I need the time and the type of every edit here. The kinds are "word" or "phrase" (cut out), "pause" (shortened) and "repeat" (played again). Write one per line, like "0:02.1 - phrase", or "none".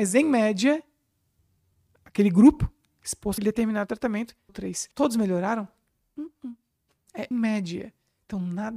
0:01.4 - pause
0:03.4 - phrase
0:04.5 - word
0:04.9 - pause
0:07.3 - word